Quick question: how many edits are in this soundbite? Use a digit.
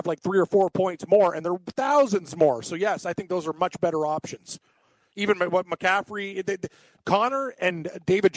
0